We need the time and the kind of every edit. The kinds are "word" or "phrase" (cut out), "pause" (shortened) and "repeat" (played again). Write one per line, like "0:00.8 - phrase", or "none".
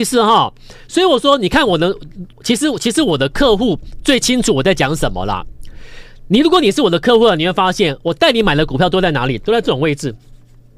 0:02.3 - pause